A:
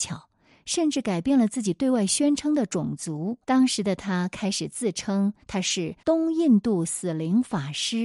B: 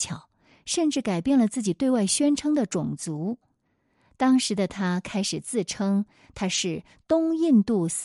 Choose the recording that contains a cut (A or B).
A